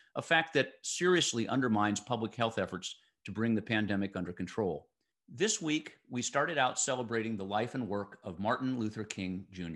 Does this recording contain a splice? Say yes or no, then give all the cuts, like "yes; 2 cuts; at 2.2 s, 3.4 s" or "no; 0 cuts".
no; 0 cuts